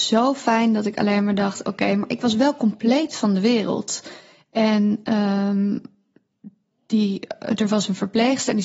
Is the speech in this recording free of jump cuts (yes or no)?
yes